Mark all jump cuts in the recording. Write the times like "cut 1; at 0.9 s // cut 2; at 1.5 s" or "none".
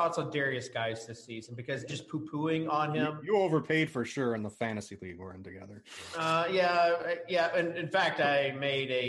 cut 1; at 1.9 s